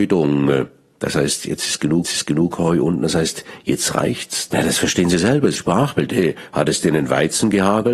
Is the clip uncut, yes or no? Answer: no